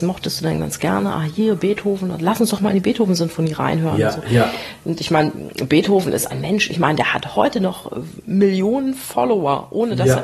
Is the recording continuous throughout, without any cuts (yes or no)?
no